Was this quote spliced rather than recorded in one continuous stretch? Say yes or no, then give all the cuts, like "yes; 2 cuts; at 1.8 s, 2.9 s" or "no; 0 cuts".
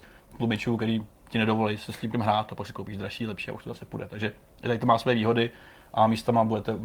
yes; 1 cut; at 2.1 s